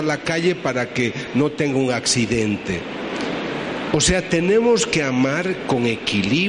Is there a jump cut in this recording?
no; 0 cuts

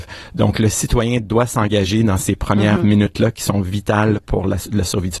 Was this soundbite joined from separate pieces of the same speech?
no; 0 cuts

